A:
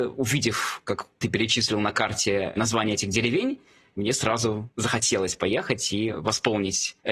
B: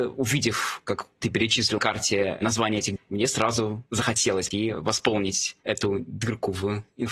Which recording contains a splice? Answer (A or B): B